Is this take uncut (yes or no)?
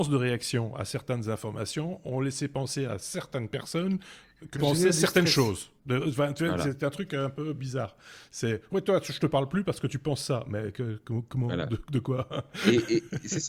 no